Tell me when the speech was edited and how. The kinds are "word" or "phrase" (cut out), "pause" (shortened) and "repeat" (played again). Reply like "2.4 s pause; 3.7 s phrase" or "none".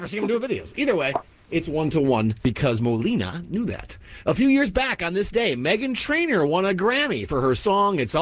none

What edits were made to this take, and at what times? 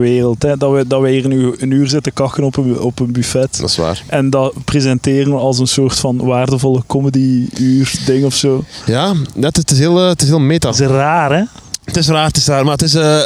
none

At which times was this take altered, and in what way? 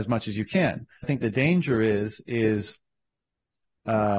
1.0 s phrase

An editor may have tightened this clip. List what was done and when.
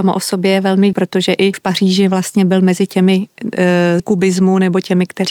0.9 s word; 1.5 s word; 4.0 s word

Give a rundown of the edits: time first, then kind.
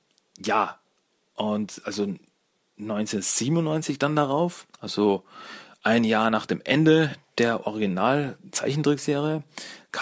4.7 s pause

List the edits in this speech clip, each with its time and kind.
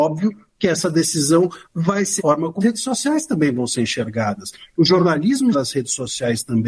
2.2 s word; 2.6 s word; 5.5 s word

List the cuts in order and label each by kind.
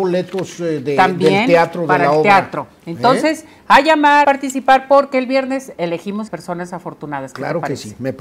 4.2 s word; 6.3 s phrase

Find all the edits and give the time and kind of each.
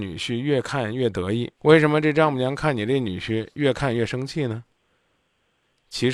1.5 s pause

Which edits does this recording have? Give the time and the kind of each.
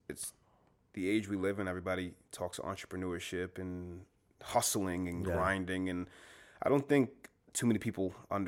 none

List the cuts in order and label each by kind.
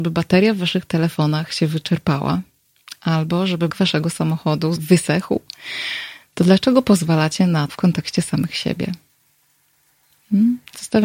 3.7 s word; 4.8 s word; 7.7 s word

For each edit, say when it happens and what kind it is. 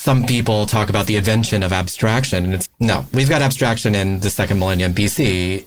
2.7 s word

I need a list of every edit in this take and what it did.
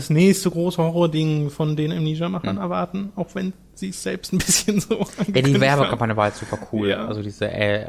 none

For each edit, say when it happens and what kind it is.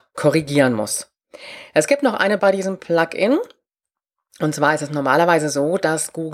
2.4 s word

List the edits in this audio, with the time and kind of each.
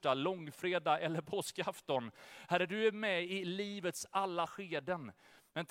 4.5 s word

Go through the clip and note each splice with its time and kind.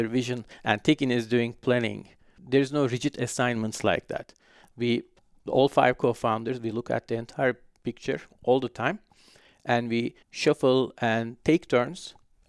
10.2 s pause

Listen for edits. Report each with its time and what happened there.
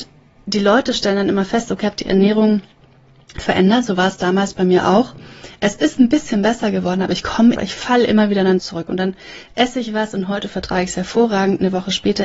1.8 s word; 7.6 s phrase; 8.6 s word

